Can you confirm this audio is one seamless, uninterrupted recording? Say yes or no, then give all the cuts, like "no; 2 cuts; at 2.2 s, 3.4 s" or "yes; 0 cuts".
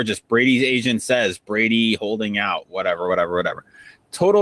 yes; 0 cuts